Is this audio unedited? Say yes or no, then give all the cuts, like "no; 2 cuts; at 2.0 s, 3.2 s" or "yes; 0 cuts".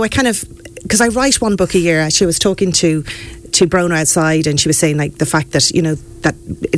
yes; 0 cuts